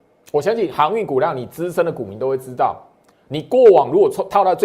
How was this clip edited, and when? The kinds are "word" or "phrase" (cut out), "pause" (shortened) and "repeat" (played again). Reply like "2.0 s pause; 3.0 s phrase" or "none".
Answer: none